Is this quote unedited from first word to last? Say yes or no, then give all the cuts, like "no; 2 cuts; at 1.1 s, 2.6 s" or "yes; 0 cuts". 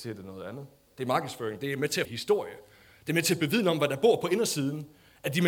no; 1 cut; at 2.0 s